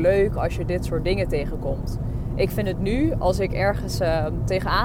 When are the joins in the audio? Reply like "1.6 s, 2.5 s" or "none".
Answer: none